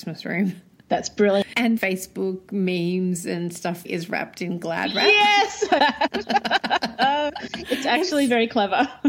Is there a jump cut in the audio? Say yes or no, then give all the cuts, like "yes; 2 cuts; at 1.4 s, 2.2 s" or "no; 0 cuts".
yes; 3 cuts; at 1.8 s, 3.8 s, 5.8 s